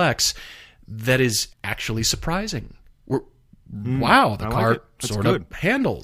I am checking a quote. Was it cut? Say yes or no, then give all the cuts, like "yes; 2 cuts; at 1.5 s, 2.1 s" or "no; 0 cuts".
yes; 1 cut; at 1.5 s